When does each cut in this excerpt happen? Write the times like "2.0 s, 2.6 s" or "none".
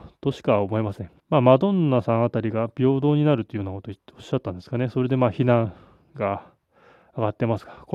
1.2 s